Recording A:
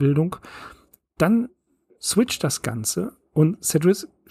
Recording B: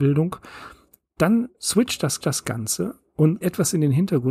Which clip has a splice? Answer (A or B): B